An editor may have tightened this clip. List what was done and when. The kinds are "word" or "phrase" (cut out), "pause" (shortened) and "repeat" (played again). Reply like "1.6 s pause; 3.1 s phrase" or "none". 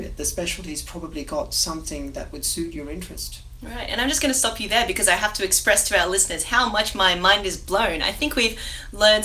none